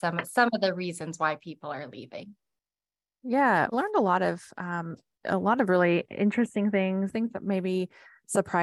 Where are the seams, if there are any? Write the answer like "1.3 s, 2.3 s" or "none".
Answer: 3.7 s